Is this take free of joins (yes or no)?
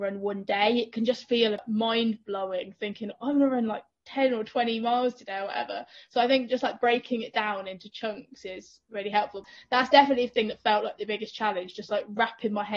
yes